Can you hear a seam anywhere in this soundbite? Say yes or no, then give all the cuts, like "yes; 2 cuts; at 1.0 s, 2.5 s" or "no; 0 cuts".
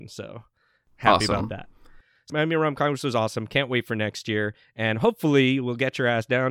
yes; 1 cut; at 2.3 s